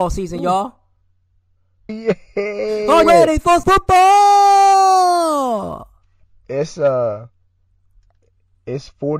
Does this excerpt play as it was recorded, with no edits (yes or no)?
no